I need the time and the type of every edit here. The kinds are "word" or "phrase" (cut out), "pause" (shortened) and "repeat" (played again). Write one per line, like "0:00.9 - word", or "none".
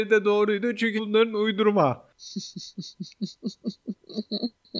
0:01.0 - word

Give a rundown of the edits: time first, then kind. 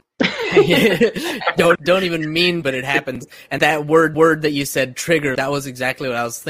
0:01.8 - phrase
0:02.6 - word
0:03.6 - word
0:04.1 - repeat
0:05.4 - word

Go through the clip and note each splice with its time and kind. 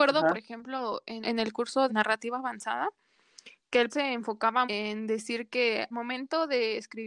0:01.2 - word
0:01.9 - word
0:03.9 - word
0:04.6 - word
0:05.9 - word

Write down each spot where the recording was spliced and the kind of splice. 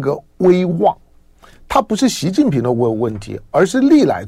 none

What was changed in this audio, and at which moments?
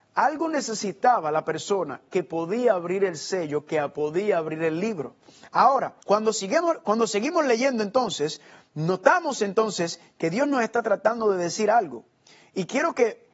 0:06.0 - pause

